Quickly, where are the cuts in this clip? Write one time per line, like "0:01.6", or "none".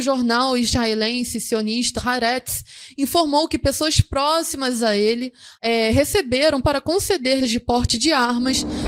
0:02.0
0:05.5
0:06.6
0:07.4